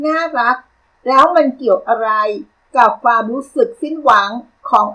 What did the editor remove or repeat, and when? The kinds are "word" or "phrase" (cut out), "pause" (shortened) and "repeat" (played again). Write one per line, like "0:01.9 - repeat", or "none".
none